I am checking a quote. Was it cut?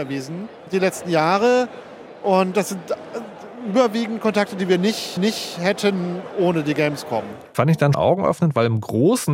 yes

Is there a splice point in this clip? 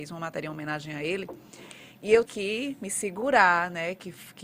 yes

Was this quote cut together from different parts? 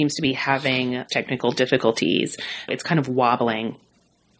yes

